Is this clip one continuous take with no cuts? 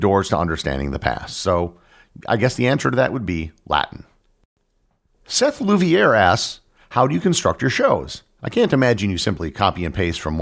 yes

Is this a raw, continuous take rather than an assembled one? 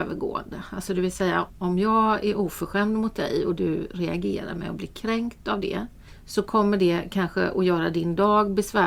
yes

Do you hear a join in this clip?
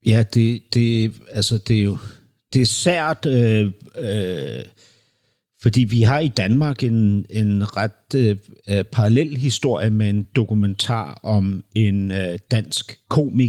no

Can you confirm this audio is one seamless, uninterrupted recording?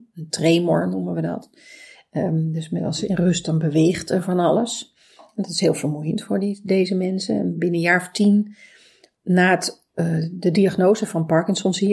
yes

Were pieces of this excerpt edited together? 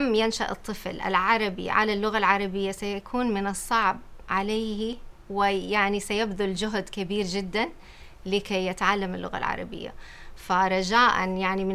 no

